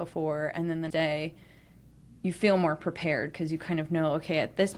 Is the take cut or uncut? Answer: cut